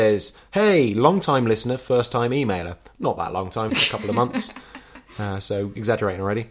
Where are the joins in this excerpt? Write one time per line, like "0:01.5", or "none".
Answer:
0:03.7